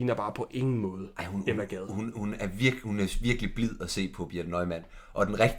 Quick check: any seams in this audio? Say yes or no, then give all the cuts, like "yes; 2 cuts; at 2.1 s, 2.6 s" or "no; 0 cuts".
no; 0 cuts